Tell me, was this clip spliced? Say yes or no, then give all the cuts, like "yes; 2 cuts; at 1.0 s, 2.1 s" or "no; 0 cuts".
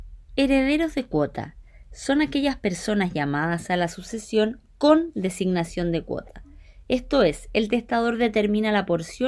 no; 0 cuts